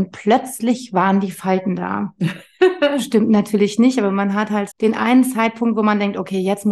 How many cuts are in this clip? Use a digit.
1